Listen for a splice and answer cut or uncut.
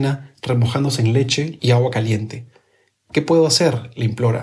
cut